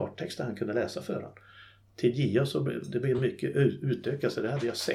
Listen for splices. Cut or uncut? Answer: uncut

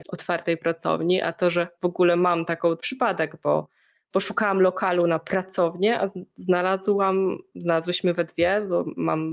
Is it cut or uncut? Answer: cut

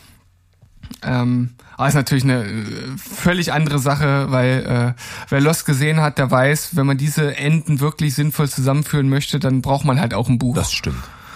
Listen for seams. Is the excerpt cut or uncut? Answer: uncut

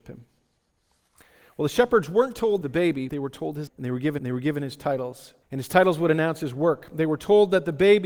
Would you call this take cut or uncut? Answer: cut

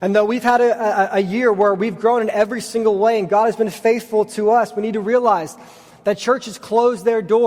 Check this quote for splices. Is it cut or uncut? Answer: uncut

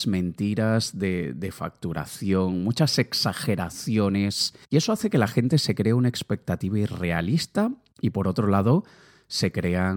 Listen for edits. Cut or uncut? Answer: cut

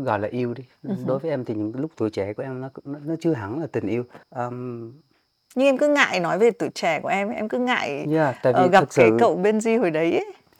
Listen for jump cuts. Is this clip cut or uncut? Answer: cut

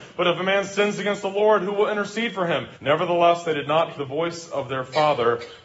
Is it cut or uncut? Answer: cut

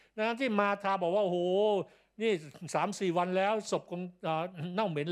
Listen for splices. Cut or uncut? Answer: uncut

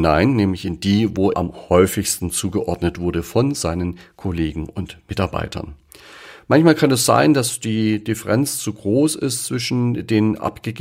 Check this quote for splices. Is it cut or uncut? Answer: cut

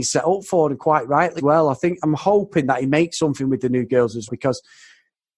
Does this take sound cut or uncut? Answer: cut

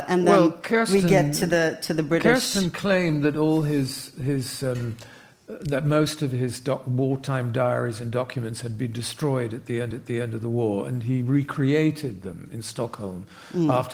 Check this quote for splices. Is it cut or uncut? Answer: cut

